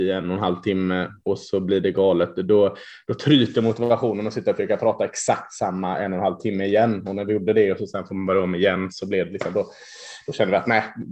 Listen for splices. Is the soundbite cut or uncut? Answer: uncut